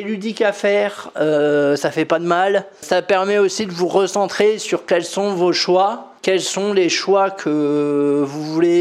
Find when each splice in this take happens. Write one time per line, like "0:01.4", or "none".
0:02.8
0:06.2